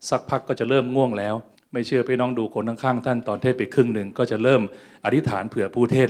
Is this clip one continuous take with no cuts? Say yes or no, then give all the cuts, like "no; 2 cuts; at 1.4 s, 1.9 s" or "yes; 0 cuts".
no; 1 cut; at 1.5 s